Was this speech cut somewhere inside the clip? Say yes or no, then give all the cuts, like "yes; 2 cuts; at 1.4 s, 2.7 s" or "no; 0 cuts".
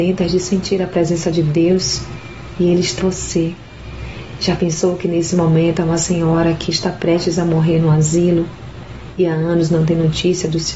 yes; 1 cut; at 3.0 s